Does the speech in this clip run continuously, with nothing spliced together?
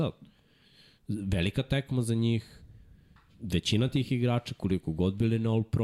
yes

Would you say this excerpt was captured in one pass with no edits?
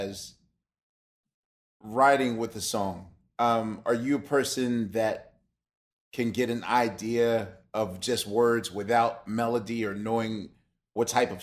yes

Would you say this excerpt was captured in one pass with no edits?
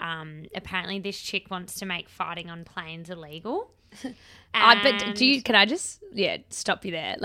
yes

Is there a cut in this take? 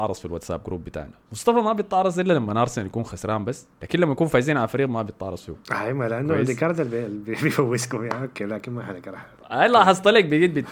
yes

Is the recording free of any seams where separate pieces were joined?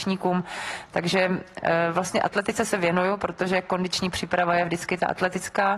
yes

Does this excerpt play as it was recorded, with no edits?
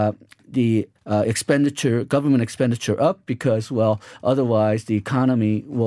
no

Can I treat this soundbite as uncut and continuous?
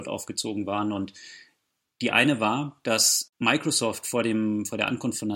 yes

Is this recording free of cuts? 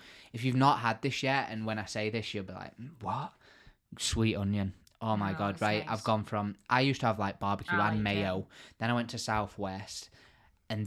yes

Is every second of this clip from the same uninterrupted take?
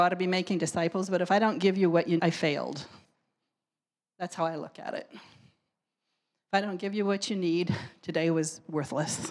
no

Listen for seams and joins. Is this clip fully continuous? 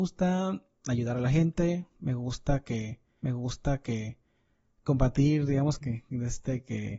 no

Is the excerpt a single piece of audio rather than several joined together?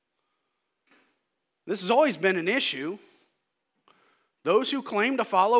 yes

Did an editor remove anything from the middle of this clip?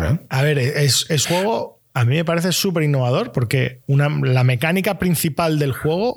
yes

